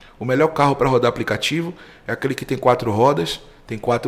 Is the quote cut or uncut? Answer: uncut